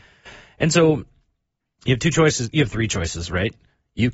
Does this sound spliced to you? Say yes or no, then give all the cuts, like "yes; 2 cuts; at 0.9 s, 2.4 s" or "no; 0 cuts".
no; 0 cuts